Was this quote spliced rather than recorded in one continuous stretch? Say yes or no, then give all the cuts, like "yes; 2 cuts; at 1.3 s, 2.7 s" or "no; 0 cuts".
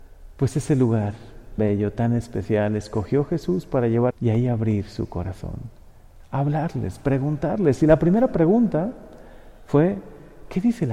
yes; 2 cuts; at 1.6 s, 4.1 s